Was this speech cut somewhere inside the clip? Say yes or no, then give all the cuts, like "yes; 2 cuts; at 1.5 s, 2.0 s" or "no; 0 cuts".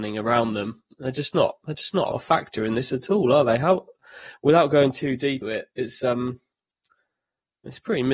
yes; 2 cuts; at 2.1 s, 5.4 s